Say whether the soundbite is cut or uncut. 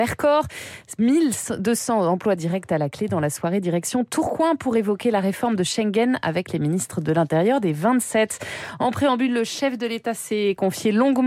uncut